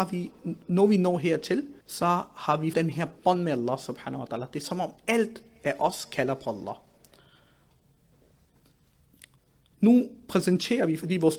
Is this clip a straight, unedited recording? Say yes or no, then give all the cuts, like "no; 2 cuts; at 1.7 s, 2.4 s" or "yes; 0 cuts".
no; 2 cuts; at 1.8 s, 2.7 s